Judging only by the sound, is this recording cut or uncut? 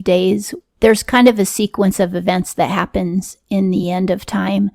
uncut